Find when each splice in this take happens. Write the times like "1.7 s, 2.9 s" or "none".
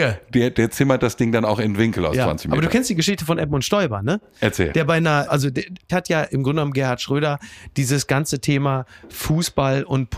5.3 s, 5.9 s